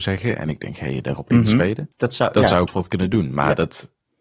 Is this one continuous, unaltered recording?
no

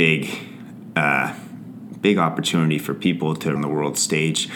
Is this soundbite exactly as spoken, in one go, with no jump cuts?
no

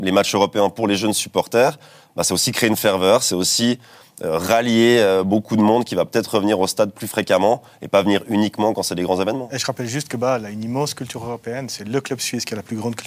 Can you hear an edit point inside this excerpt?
no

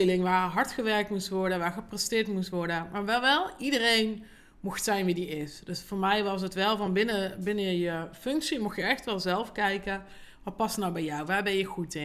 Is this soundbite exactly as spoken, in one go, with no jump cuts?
yes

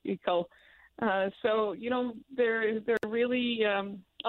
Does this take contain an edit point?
yes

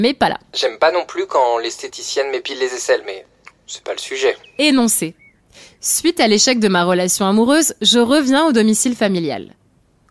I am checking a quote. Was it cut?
no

